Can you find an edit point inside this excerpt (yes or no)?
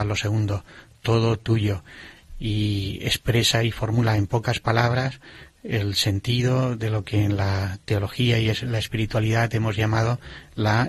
no